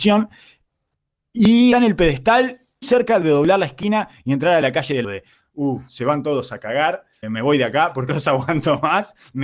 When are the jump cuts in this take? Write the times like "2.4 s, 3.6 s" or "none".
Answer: 1.7 s, 2.8 s, 3.2 s, 5.0 s, 7.2 s, 8.1 s